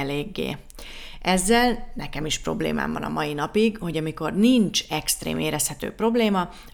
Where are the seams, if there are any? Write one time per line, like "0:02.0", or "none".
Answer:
none